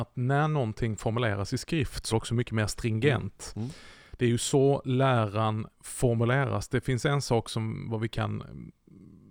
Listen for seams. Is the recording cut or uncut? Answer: cut